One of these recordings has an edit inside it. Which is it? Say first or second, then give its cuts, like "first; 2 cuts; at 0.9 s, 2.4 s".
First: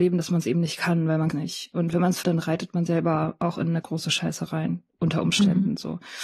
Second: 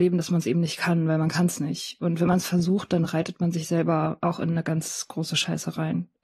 first; 5 cuts; at 1.3 s, 2.2 s, 2.9 s, 3.8 s, 4.9 s